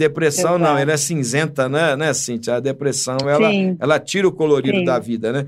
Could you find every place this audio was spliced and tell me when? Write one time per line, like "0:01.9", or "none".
none